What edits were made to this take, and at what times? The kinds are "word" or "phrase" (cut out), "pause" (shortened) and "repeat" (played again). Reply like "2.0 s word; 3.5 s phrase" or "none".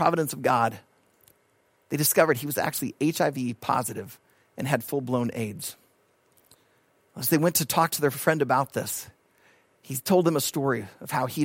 none